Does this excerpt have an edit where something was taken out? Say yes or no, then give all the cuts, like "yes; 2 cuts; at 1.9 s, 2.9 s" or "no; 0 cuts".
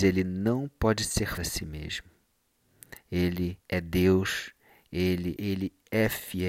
yes; 3 cuts; at 1.4 s, 3.6 s, 5.4 s